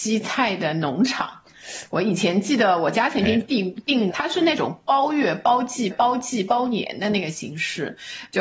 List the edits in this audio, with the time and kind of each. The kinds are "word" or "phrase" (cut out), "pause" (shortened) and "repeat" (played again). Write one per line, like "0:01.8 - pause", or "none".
0:04.1 - phrase
0:05.9 - repeat